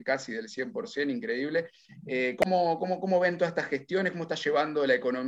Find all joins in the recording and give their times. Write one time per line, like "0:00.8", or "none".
none